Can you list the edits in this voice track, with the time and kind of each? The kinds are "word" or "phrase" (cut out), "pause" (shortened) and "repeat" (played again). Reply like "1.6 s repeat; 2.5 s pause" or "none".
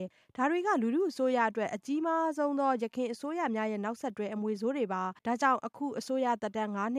5.2 s pause